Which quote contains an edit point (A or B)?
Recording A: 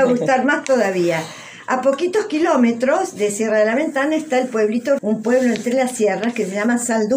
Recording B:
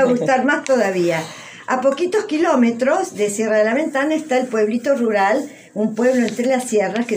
A